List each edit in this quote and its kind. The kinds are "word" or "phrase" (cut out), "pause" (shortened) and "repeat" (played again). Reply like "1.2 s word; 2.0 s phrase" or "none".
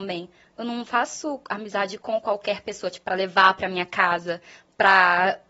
none